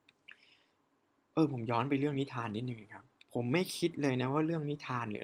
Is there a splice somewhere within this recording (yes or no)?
yes